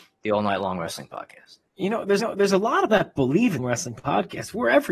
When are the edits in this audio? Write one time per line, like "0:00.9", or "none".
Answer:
0:01.7
0:02.2
0:02.9
0:03.6